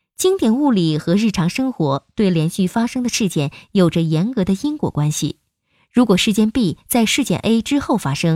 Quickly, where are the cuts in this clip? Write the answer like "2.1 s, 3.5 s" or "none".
none